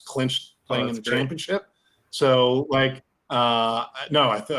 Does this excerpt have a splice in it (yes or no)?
no